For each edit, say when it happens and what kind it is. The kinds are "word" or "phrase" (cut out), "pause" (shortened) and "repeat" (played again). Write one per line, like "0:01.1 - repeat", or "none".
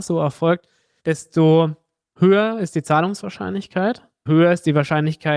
0:04.3 - word